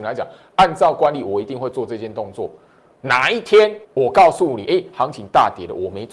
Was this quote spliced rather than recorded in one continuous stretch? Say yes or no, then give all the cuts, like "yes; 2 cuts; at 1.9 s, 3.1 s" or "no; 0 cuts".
yes; 1 cut; at 3.8 s